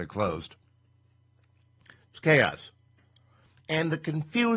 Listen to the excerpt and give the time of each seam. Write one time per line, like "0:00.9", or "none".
none